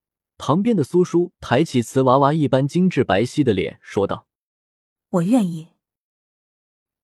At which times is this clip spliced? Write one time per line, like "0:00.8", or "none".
none